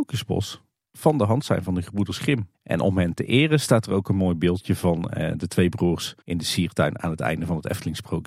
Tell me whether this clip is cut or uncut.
cut